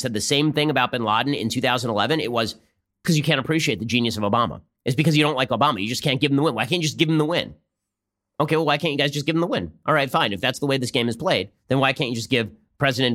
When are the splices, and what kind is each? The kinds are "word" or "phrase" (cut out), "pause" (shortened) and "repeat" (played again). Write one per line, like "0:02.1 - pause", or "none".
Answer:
0:03.0 - phrase
0:11.6 - pause